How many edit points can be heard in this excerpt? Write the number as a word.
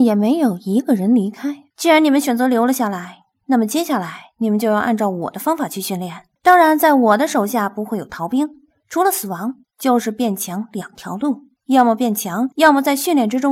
five